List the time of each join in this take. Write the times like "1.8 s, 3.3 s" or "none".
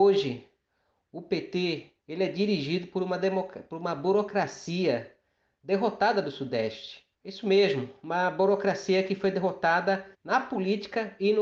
2.0 s, 7.1 s, 10.1 s